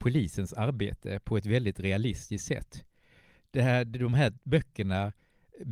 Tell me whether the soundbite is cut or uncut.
uncut